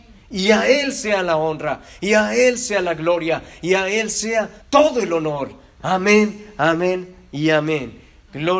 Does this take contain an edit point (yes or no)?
yes